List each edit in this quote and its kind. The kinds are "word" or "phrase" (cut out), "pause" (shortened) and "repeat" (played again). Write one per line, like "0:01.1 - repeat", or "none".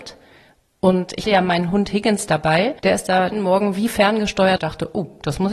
0:01.2 - word
0:02.8 - pause
0:03.3 - phrase
0:04.6 - phrase